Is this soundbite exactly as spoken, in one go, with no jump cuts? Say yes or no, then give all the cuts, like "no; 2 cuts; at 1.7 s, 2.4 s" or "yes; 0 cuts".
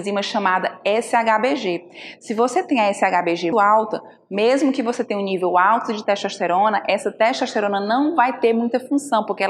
no; 1 cut; at 3.5 s